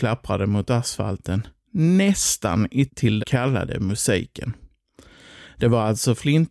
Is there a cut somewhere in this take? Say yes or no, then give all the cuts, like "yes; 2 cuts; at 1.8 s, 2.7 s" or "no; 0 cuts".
yes; 2 cuts; at 2.9 s, 3.2 s